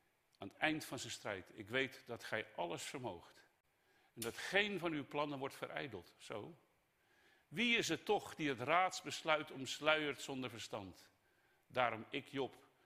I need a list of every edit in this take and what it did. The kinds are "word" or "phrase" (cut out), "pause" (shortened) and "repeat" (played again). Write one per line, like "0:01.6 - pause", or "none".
none